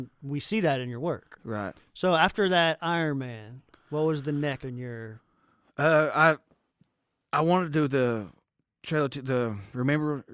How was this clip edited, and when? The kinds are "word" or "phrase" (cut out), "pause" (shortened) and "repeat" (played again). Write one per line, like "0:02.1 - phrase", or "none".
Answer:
0:04.6 - word